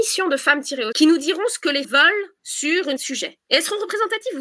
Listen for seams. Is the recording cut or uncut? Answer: cut